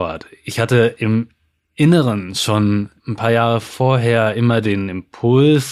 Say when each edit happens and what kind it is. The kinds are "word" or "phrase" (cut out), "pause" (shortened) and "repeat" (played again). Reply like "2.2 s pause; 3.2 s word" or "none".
3.0 s pause